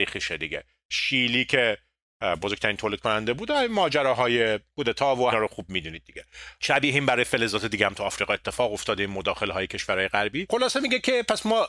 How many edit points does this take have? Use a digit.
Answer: 1